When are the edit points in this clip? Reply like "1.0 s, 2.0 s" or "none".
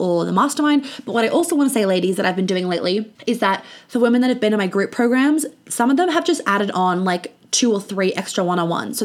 3.2 s